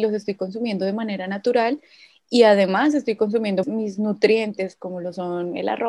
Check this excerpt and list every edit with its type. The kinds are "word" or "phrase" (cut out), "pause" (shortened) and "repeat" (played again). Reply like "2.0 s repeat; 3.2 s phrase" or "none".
3.6 s word